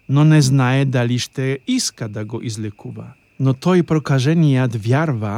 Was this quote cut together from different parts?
no; 0 cuts

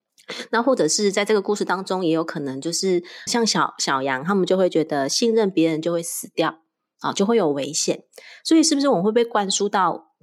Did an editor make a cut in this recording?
yes; 1 cut; at 3.3 s

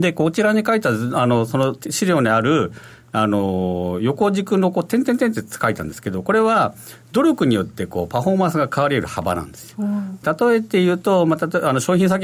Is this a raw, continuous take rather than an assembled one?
no; 1 cut; at 10.2 s

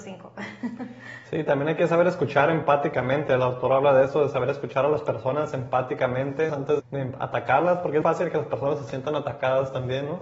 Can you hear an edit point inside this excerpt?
yes; 3 cuts; at 6.5 s, 6.8 s, 8.0 s

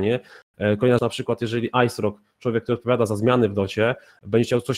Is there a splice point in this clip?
yes; 1 cut; at 1.0 s

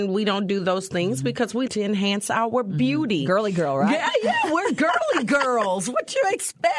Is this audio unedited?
no; 1 cut; at 1.7 s

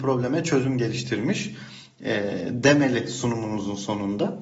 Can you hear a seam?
no; 0 cuts

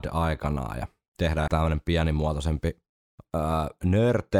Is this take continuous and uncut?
no; 1 cut; at 1.5 s

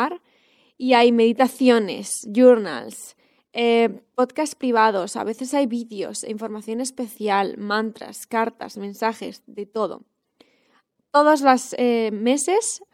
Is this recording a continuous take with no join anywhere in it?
yes; 0 cuts

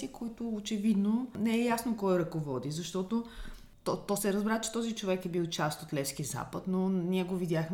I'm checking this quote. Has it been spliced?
no; 0 cuts

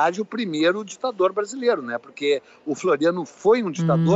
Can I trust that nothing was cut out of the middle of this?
yes; 0 cuts

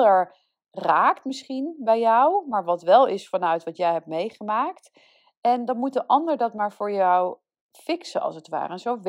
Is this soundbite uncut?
yes; 0 cuts

